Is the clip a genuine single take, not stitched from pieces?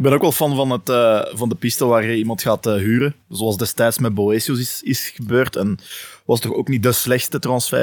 yes; 0 cuts

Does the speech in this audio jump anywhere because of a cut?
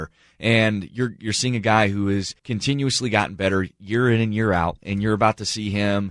yes; 1 cut; at 2.4 s

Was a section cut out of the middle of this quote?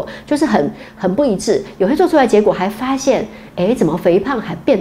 no; 0 cuts

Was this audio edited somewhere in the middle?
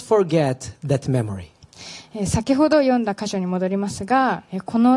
no; 0 cuts

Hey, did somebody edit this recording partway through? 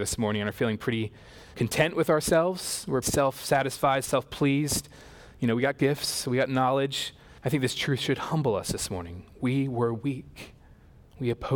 yes; 3 cuts; at 1.5 s, 3.0 s, 7.4 s

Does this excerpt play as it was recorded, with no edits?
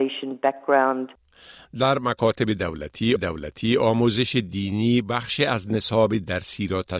no; 1 cut; at 3.2 s

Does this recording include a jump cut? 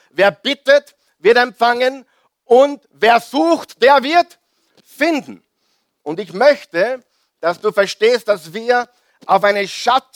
no; 0 cuts

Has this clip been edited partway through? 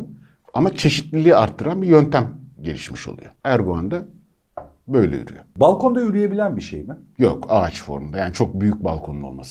no; 0 cuts

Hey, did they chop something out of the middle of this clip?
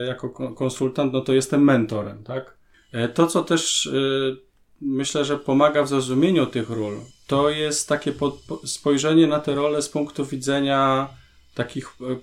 no; 0 cuts

